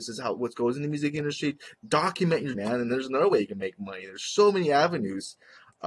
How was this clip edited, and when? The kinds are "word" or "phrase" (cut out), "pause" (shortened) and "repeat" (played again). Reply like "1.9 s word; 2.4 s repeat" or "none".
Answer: 1.8 s pause; 2.5 s word